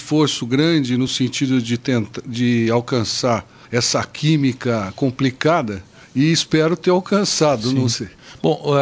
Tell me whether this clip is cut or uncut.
uncut